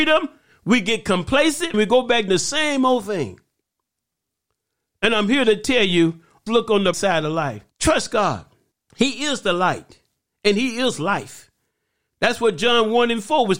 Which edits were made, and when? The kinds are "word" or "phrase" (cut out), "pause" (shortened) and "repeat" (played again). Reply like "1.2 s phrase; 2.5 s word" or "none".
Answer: 1.7 s word; 2.3 s word; 6.5 s word; 6.9 s word; 7.7 s pause; 8.7 s pause